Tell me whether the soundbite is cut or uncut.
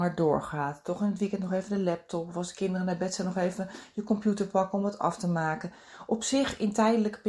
uncut